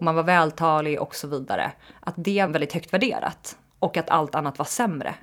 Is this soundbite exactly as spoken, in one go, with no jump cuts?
no; 1 cut; at 2.5 s

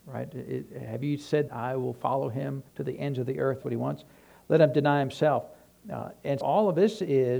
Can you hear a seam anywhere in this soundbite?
yes; 4 cuts; at 1.5 s, 2.7 s, 3.6 s, 6.4 s

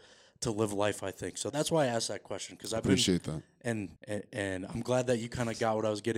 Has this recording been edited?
yes; 2 cuts; at 1.5 s, 4.0 s

